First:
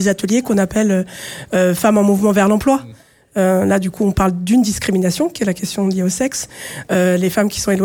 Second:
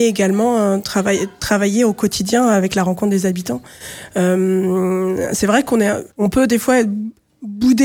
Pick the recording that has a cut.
second; 1 cut; at 6.1 s

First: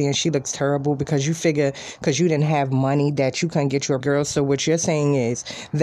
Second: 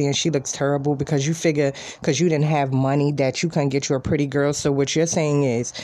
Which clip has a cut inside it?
first; 1 cut; at 4.0 s

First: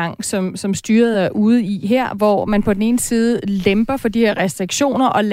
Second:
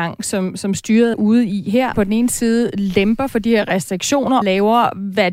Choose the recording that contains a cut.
second; 3 cuts; at 1.1 s, 1.9 s, 4.4 s

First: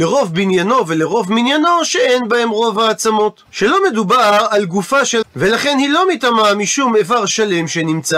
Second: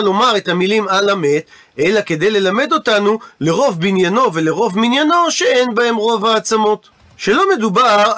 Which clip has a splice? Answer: first; 2 cuts; at 3.5 s, 5.2 s

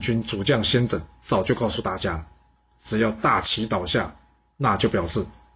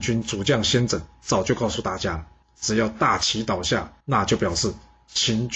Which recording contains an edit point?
second; 2 cuts; at 2.4 s, 4.0 s

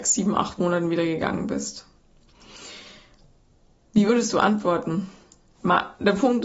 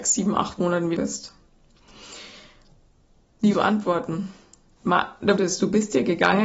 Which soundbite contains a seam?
second; 3 cuts; at 1.0 s, 3.5 s, 5.4 s

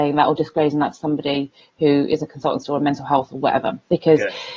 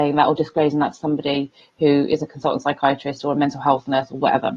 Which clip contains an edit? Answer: first; 2 cuts; at 2.6 s, 3.3 s

